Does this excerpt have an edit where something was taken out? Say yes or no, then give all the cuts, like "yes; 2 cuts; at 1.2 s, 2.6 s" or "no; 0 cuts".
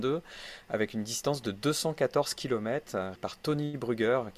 yes; 1 cut; at 3.2 s